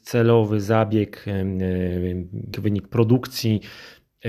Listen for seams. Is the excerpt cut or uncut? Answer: cut